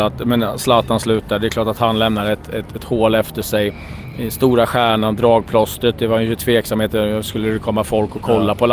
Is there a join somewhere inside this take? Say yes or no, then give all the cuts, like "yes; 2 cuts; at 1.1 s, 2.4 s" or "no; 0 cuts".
no; 0 cuts